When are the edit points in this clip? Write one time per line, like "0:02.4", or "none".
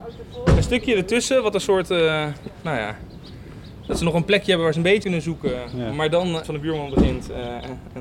0:05.0
0:06.4